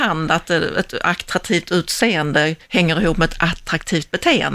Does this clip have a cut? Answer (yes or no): no